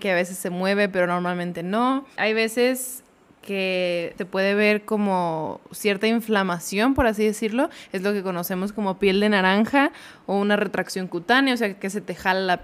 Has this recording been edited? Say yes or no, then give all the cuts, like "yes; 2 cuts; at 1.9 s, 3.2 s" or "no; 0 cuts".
yes; 1 cut; at 2.1 s